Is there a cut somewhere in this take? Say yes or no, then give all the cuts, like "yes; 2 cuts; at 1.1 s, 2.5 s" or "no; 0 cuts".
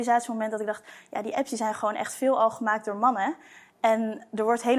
no; 0 cuts